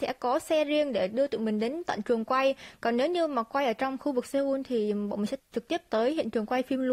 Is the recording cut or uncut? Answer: cut